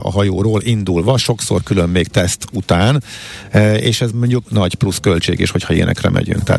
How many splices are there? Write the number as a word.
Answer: one